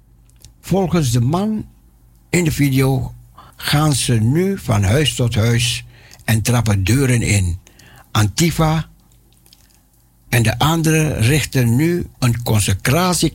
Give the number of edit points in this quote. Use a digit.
1